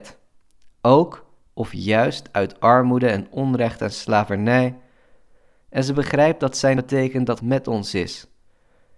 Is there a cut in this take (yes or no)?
yes